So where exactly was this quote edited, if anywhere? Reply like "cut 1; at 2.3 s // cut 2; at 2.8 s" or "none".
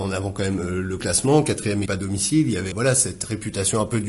cut 1; at 1.0 s // cut 2; at 1.9 s // cut 3; at 2.7 s